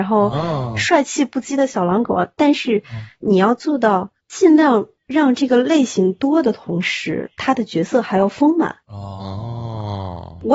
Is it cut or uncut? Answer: cut